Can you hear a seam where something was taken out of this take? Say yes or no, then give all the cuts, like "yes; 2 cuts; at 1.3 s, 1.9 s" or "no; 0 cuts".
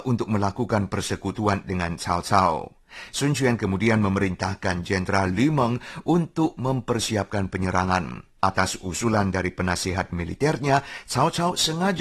yes; 1 cut; at 8.4 s